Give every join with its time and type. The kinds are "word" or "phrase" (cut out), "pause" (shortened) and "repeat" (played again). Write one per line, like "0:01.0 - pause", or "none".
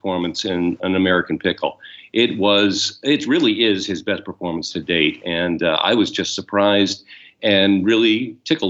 none